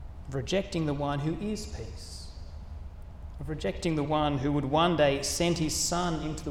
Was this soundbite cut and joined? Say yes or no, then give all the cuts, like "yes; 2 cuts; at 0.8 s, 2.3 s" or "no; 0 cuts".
no; 0 cuts